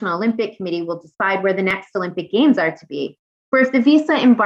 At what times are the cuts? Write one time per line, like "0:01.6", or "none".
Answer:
none